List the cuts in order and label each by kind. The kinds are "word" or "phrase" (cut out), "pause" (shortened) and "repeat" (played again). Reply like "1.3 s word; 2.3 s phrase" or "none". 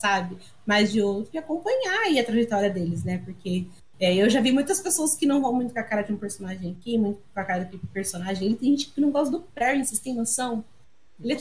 7.3 s pause